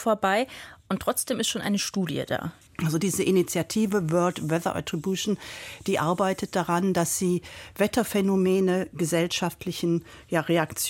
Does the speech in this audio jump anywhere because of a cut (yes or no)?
yes